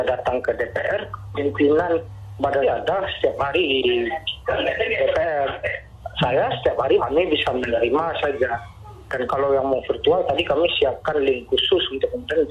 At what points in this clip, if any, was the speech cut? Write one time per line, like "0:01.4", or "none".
0:02.6
0:07.0
0:08.2
0:09.3